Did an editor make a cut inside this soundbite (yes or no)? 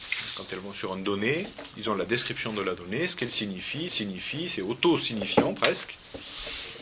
yes